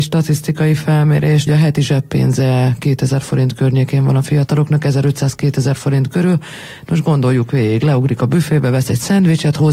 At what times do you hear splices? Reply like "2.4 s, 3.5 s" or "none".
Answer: 1.5 s